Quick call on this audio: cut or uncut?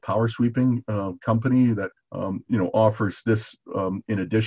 cut